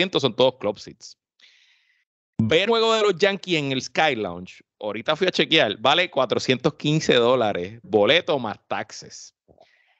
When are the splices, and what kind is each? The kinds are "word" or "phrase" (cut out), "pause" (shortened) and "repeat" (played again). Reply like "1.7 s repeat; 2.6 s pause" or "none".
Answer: 2.7 s word; 7.8 s word